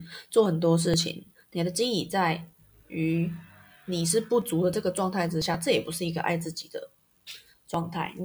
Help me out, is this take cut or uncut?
uncut